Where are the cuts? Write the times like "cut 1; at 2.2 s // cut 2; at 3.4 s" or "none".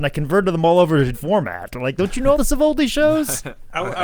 cut 1; at 1.1 s // cut 2; at 2.4 s

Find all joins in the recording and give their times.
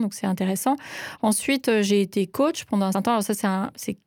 cut 1; at 2.9 s

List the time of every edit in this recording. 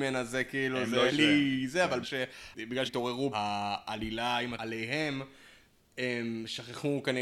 cut 1; at 1.1 s // cut 2; at 2.0 s // cut 3; at 2.9 s // cut 4; at 3.3 s // cut 5; at 4.6 s

